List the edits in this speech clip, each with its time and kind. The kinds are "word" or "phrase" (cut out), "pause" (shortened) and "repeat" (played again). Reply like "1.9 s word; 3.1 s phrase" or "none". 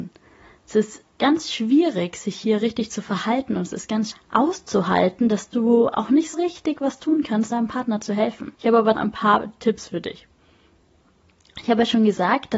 4.1 s word; 6.3 s word; 7.5 s word; 8.5 s pause; 8.9 s word